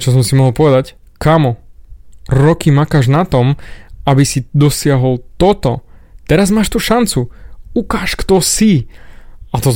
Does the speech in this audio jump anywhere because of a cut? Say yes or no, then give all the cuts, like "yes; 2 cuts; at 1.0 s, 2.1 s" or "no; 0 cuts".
no; 0 cuts